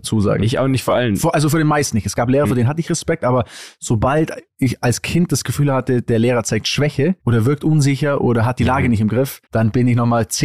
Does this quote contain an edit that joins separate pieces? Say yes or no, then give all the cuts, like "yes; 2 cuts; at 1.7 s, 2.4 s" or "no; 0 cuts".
yes; 2 cuts; at 7.2 s, 9.5 s